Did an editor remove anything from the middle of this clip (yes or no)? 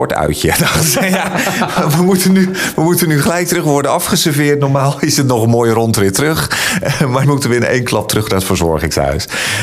yes